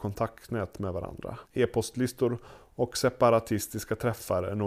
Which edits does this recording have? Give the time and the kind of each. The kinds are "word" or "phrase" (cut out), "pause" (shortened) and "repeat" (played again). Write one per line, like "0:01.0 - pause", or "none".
0:01.5 - pause